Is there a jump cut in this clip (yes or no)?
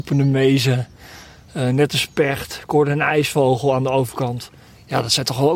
no